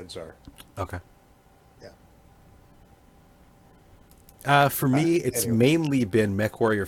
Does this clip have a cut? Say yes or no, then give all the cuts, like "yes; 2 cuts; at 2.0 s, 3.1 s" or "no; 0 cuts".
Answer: no; 0 cuts